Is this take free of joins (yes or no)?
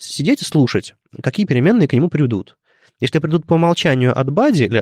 yes